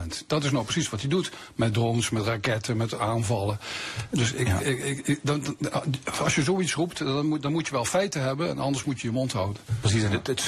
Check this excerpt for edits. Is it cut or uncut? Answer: uncut